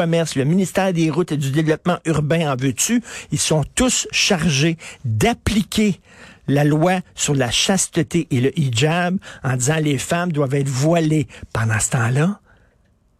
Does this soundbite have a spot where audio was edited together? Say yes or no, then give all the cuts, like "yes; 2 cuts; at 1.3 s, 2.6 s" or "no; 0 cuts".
no; 0 cuts